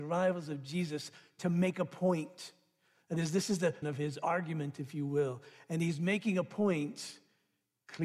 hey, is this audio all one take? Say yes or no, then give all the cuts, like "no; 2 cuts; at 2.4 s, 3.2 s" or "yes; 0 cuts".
no; 1 cut; at 3.8 s